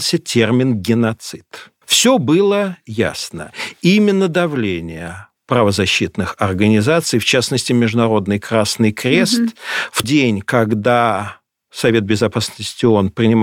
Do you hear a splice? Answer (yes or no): yes